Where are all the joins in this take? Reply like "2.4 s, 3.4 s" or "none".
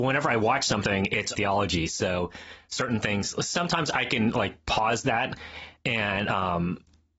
1.4 s